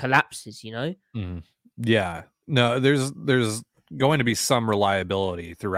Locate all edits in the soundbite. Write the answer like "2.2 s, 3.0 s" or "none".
none